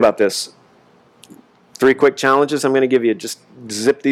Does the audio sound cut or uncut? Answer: uncut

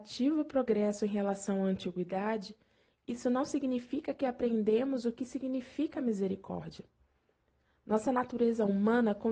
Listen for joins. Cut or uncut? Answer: uncut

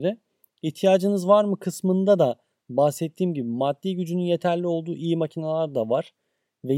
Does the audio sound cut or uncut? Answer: uncut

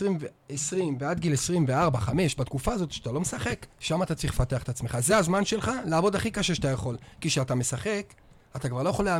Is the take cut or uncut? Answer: uncut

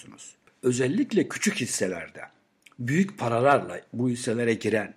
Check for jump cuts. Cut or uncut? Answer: uncut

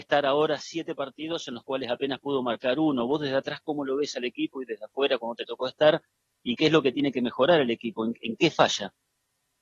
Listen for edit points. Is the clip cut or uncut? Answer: uncut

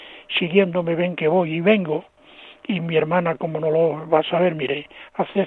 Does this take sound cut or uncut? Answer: uncut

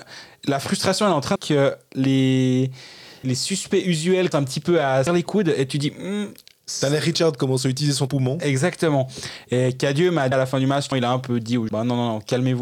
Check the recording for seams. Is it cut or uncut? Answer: cut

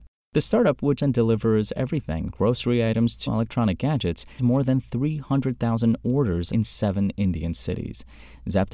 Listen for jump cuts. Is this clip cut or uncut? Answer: cut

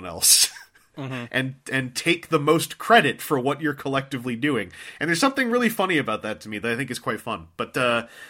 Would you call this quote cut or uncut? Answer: uncut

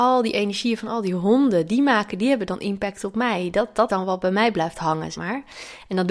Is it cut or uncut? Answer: cut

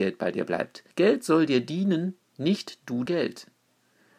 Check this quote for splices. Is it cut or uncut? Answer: cut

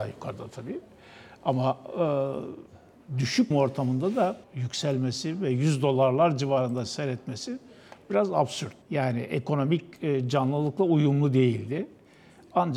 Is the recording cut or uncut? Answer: cut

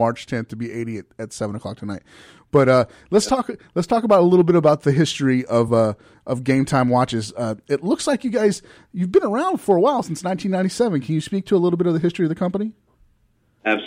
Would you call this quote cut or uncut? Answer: uncut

